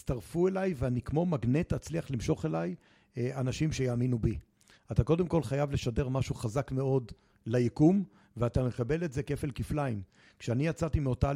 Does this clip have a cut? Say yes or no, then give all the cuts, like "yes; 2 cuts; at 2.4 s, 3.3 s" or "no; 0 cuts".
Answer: no; 0 cuts